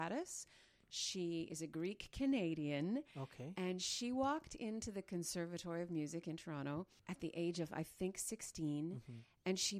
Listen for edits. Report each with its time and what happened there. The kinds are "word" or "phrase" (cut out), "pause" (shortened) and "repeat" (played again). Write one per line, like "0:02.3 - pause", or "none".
0:07.0 - pause